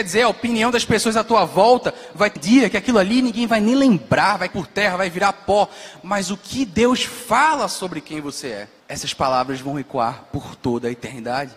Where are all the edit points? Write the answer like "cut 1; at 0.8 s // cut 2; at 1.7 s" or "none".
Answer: cut 1; at 2.4 s // cut 2; at 4.5 s // cut 3; at 8.8 s